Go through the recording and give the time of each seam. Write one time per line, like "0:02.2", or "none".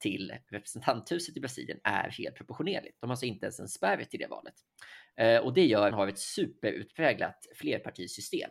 0:05.9

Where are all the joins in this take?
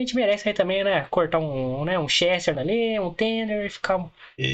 0:02.5

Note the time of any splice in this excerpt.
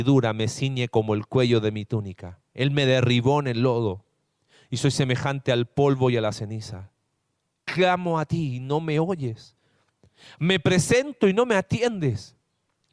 0:02.5

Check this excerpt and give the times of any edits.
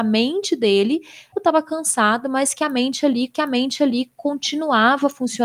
0:01.3
0:03.3

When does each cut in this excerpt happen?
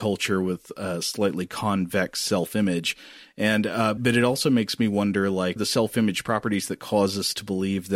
0:04.0
0:05.6

